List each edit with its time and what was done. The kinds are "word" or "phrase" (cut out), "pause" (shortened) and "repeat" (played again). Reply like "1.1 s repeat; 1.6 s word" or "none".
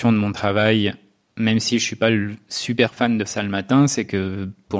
3.2 s word